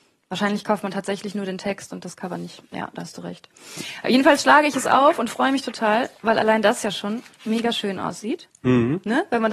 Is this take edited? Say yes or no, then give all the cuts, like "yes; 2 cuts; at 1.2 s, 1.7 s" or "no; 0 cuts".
no; 0 cuts